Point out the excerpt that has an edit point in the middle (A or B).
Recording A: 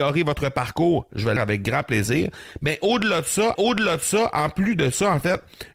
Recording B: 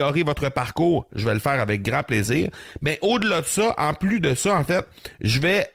A